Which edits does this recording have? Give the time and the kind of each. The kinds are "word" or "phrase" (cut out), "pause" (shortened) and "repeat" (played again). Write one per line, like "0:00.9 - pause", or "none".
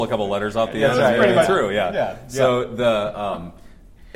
0:01.5 - word